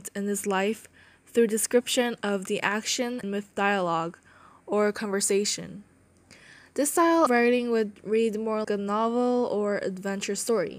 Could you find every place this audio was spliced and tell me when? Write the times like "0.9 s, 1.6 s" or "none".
3.2 s, 7.3 s, 8.6 s

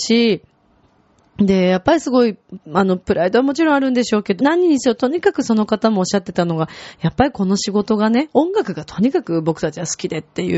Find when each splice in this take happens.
2.6 s, 4.4 s

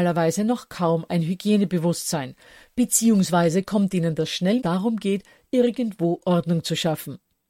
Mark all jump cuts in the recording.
4.6 s

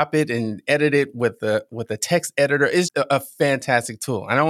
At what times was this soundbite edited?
2.9 s

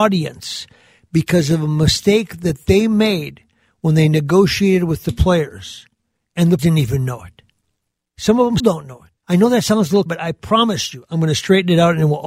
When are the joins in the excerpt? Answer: 6.6 s, 8.6 s, 9.2 s, 10.1 s

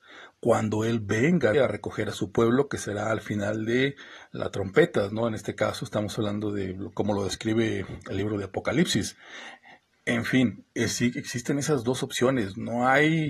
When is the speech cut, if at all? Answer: 1.5 s

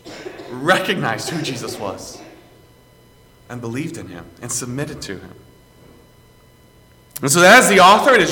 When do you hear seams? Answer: none

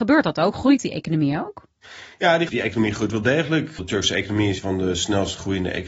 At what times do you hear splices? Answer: 2.5 s, 3.8 s, 4.6 s

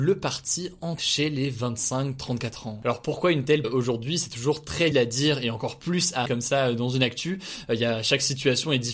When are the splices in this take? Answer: 1.0 s, 3.6 s, 4.9 s, 6.3 s

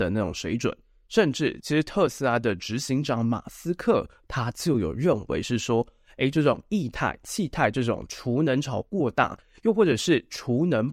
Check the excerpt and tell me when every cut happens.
none

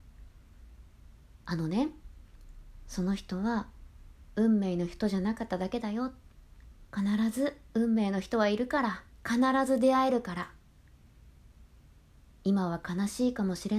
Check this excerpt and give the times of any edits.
6.9 s, 9.1 s

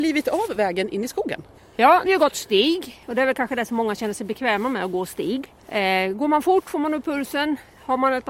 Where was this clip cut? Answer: 1.6 s, 2.1 s, 5.6 s

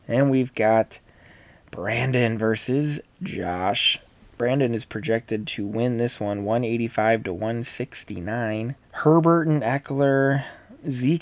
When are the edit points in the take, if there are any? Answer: 8.8 s

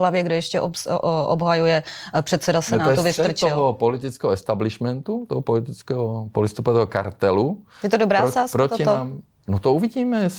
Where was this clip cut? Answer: none

